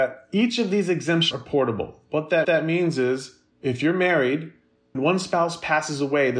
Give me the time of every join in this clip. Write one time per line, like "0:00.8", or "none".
0:01.3
0:02.4
0:03.5
0:04.9